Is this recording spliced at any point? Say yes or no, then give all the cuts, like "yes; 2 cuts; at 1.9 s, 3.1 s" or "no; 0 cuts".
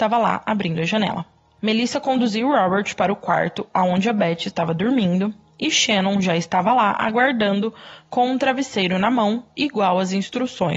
no; 0 cuts